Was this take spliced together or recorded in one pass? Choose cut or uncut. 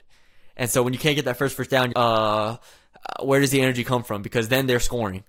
cut